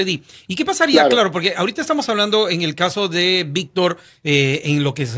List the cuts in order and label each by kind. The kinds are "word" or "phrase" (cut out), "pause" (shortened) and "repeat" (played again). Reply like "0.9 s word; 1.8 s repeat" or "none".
none